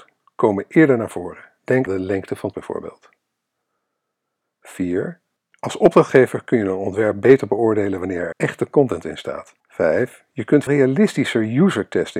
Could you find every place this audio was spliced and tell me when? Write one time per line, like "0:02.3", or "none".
0:01.9
0:02.5
0:05.4
0:08.3
0:09.6
0:10.7

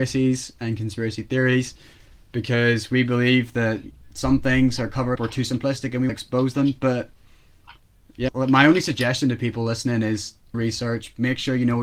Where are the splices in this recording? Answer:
0:05.2
0:06.1
0:08.3
0:10.5

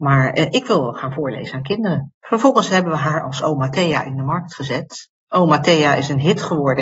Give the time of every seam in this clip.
0:02.2

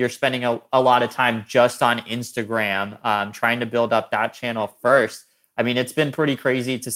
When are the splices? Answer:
none

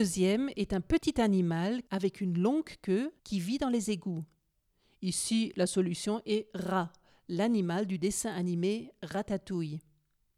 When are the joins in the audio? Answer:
0:01.9
0:03.2

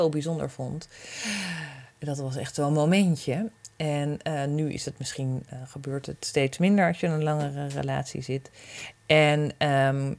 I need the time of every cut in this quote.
none

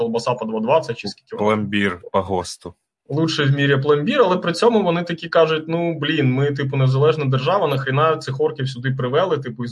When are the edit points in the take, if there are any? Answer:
none

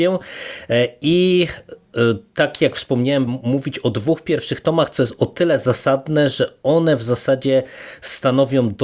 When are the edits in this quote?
0:03.3

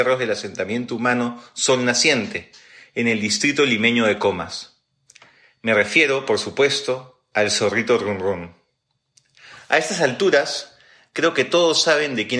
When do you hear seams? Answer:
none

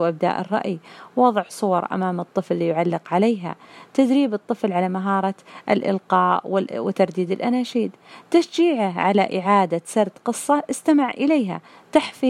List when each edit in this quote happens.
none

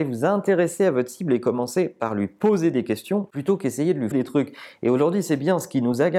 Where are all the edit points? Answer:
0:04.1

